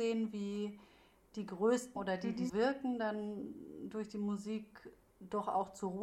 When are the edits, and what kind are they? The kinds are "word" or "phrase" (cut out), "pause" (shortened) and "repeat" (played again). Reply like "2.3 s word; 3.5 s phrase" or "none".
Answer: 2.0 s word; 2.5 s word